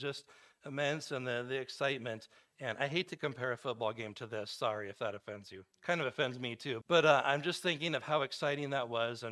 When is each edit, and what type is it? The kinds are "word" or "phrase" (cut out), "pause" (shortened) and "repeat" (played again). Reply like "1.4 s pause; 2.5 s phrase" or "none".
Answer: 5.7 s pause; 6.8 s word